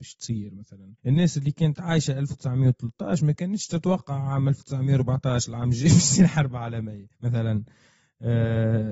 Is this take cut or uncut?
cut